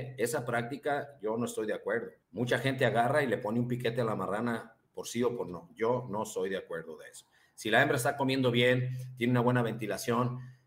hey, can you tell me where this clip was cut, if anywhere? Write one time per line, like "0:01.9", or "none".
0:02.2
0:04.8